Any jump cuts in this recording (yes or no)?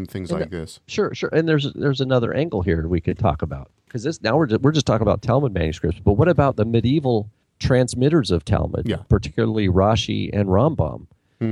yes